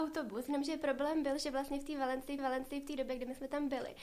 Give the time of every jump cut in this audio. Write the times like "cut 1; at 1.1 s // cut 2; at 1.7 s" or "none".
cut 1; at 2.4 s